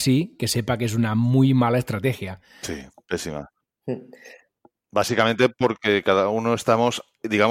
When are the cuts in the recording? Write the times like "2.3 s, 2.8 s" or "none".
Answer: none